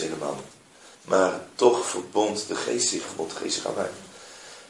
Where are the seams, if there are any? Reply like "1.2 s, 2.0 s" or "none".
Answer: 0.9 s, 3.1 s